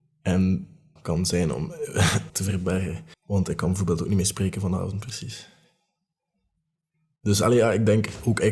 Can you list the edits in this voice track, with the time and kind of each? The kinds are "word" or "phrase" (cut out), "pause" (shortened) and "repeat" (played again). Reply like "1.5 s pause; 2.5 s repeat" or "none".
1.0 s phrase; 2.3 s word; 3.1 s pause

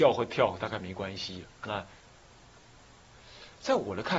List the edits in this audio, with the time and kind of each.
1.5 s pause

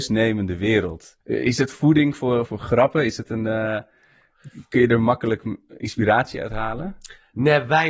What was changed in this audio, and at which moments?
1.2 s pause; 2.5 s phrase

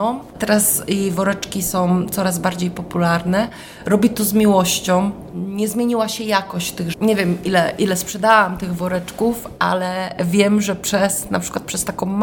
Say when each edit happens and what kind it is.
6.9 s phrase

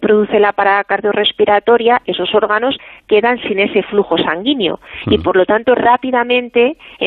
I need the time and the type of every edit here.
none

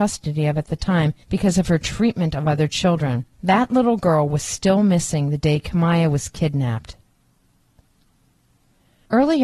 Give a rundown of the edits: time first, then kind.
1.2 s pause; 3.3 s pause

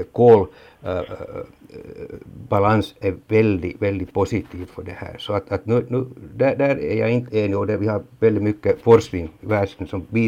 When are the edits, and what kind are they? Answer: none

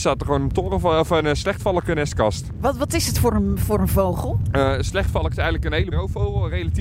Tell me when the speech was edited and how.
5.9 s word

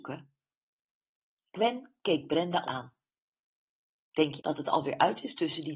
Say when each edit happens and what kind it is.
2.0 s pause; 2.7 s word; 4.4 s word

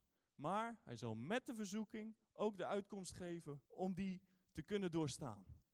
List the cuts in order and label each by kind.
2.2 s pause; 3.7 s pause

